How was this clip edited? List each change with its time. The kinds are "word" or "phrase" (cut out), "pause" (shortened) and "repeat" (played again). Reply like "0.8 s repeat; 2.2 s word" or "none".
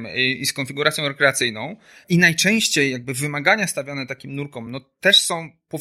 none